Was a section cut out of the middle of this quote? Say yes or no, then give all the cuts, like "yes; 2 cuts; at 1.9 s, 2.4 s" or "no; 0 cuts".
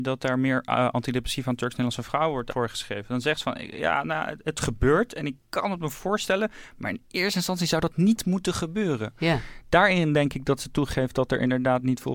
yes; 1 cut; at 5.4 s